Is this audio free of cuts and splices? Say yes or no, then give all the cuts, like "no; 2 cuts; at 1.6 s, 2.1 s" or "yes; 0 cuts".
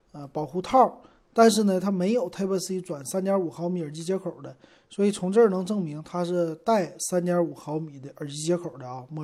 yes; 0 cuts